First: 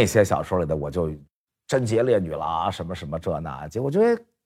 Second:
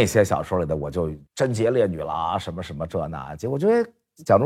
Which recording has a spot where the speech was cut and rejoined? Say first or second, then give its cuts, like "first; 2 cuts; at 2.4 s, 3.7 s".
second; 1 cut; at 1.3 s